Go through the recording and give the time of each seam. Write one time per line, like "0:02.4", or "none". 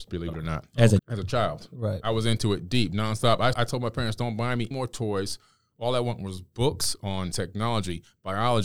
0:01.0
0:03.5
0:04.7
0:07.3